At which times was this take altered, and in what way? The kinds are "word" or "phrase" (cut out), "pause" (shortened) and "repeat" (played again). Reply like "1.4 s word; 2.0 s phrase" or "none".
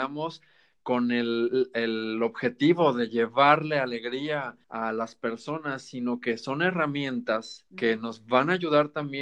4.6 s pause; 7.7 s pause